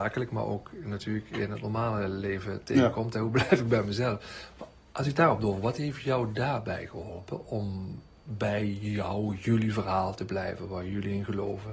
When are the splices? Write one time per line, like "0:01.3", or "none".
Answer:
none